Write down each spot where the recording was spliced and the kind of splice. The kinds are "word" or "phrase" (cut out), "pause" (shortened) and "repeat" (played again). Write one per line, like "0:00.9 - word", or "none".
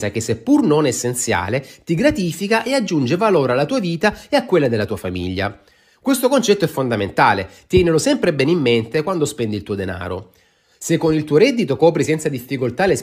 none